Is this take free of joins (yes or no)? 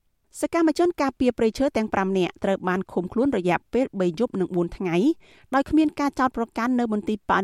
yes